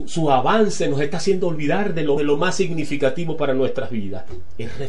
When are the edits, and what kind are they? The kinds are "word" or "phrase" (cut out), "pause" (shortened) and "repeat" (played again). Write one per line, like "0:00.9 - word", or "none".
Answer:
0:02.2 - phrase

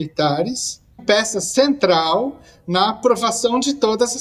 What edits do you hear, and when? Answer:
0:01.0 - word

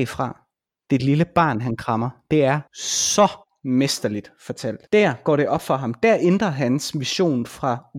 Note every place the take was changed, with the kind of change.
0:02.7 - pause
0:04.9 - pause

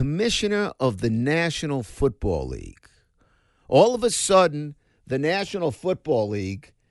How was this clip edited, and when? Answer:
none

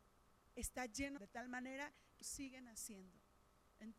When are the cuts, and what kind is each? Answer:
0:01.2 - phrase
0:02.2 - word

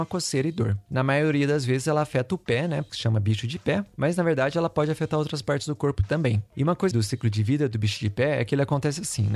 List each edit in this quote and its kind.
0:02.9 - word
0:06.9 - word

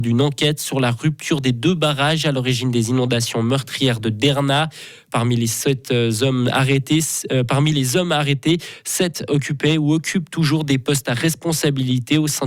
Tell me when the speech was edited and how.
none

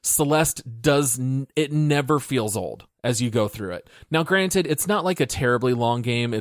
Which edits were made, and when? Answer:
none

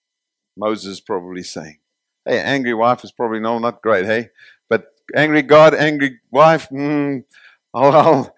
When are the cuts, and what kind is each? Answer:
none

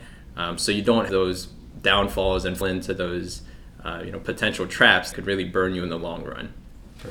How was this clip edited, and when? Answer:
0:01.1 - word
0:02.6 - word
0:05.1 - word

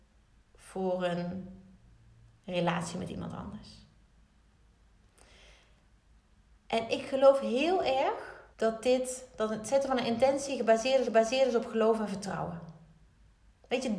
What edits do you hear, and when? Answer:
0:08.5 - pause
0:11.0 - repeat

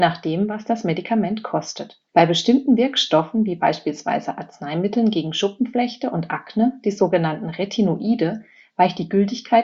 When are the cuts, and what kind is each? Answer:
0:02.0 - pause

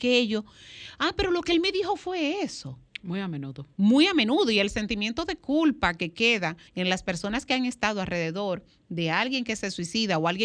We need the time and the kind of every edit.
0:06.7 - pause

